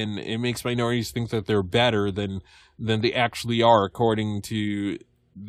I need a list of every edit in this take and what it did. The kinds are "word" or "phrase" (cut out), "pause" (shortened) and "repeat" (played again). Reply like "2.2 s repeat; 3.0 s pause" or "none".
none